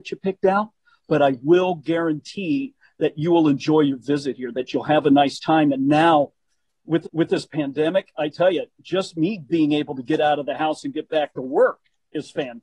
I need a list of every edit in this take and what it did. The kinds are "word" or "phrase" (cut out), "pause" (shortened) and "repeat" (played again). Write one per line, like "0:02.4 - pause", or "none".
0:07.0 - repeat